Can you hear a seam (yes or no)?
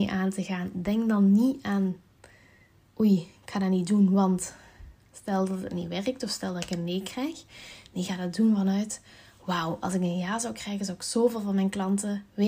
no